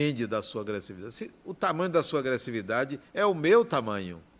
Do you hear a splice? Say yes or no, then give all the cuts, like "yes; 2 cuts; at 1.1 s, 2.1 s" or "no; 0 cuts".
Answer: no; 0 cuts